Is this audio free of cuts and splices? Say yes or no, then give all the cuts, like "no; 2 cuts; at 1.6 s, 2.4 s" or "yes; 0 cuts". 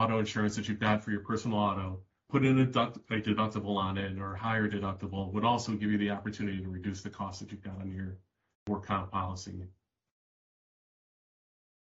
yes; 0 cuts